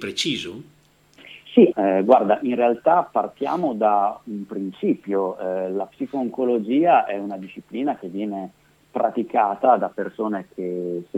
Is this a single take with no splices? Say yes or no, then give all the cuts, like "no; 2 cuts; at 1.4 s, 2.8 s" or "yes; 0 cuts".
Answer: no; 1 cut; at 1.7 s